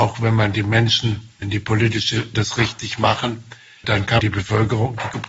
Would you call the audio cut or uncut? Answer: cut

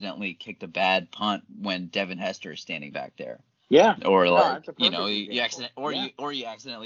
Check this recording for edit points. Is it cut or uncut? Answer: uncut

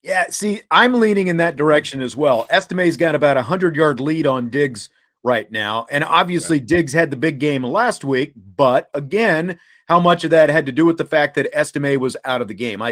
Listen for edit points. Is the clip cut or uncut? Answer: uncut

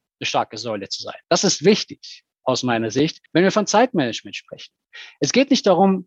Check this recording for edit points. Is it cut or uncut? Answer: cut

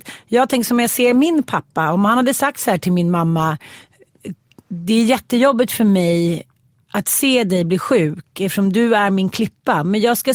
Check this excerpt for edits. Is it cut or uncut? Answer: uncut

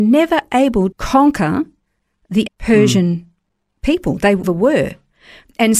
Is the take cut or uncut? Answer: cut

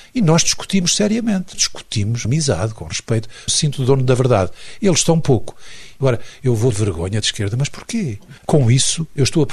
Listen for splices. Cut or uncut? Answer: cut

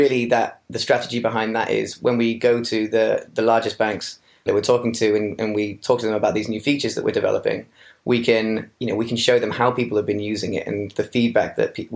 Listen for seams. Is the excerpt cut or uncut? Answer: cut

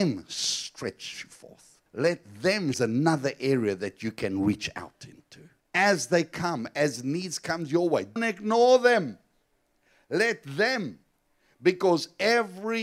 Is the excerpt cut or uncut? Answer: cut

